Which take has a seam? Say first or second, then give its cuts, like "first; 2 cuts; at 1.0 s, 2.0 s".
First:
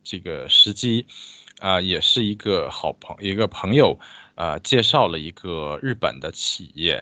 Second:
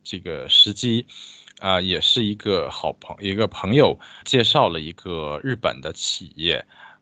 second; 1 cut; at 4.2 s